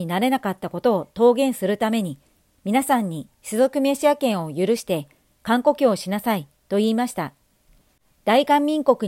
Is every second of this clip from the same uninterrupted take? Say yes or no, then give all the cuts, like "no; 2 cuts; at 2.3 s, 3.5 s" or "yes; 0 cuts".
yes; 0 cuts